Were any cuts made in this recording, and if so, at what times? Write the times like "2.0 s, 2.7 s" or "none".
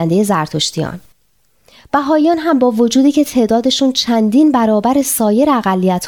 none